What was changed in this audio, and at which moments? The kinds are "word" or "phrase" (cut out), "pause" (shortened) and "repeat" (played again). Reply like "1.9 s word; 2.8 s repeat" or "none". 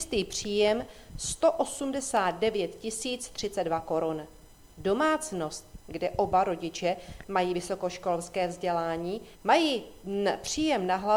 9.3 s pause